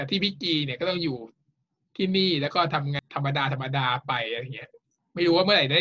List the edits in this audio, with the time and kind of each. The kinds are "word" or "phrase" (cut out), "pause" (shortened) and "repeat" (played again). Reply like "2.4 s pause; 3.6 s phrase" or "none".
none